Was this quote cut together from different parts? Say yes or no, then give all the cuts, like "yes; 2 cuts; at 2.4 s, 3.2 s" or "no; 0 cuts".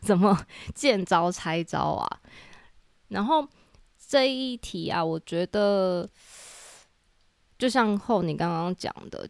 no; 0 cuts